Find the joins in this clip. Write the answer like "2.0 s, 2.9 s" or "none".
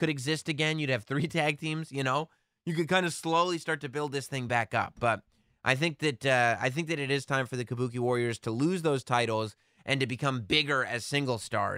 none